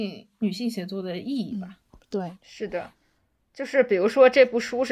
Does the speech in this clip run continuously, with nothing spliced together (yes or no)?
yes